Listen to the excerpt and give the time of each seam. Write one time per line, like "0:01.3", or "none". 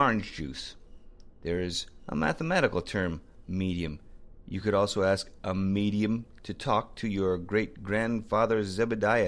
none